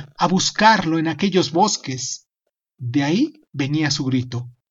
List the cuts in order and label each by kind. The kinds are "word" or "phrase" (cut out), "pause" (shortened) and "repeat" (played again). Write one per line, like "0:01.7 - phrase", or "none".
none